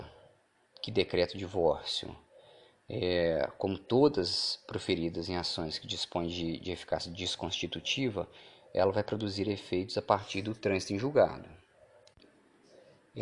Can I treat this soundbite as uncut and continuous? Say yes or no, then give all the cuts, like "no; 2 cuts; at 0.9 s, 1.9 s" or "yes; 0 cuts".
yes; 0 cuts